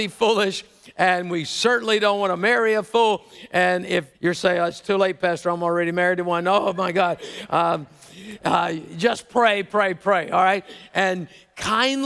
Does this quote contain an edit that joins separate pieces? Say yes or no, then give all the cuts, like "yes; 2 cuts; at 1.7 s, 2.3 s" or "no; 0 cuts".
yes; 1 cut; at 4.1 s